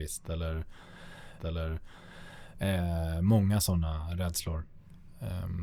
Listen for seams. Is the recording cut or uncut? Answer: cut